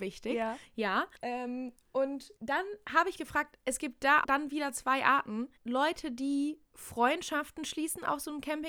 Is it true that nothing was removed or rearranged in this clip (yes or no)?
no